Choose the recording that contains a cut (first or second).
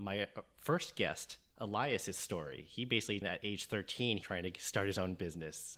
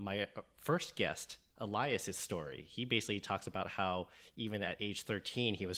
first